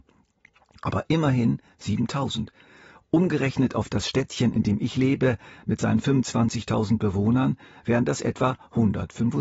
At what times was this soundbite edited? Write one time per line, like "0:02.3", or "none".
none

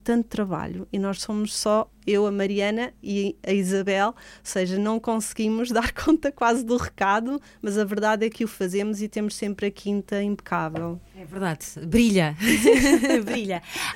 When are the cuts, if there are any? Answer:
0:11.0

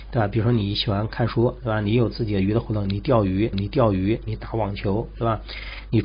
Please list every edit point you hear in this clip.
0:03.5

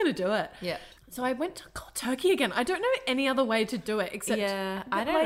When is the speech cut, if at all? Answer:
none

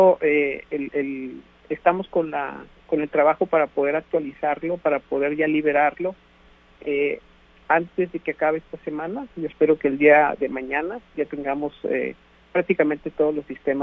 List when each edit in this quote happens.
none

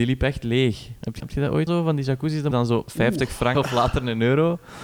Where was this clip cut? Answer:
0:01.2
0:01.7
0:02.5
0:03.5

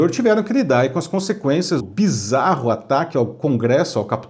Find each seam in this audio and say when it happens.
0:01.8

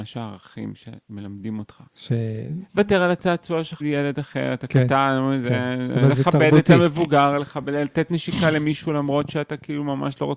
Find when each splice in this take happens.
0:01.9
0:03.8

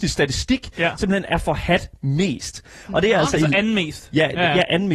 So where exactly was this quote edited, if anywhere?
none

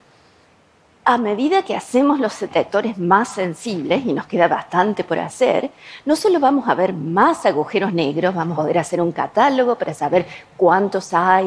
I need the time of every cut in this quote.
0:08.5

